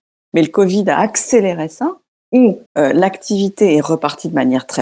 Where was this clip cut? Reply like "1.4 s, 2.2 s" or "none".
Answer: 2.7 s